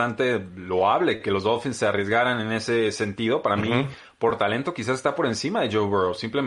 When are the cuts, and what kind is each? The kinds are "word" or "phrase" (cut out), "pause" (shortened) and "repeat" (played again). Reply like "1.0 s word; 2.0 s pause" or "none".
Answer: none